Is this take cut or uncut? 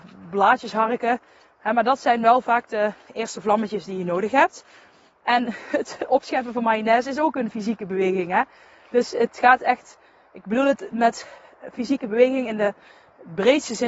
uncut